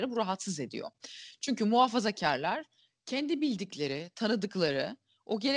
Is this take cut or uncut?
uncut